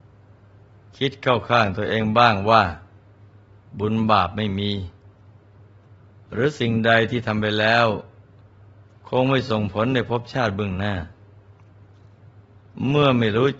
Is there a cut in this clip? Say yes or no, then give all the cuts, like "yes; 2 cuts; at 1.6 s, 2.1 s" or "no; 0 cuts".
no; 0 cuts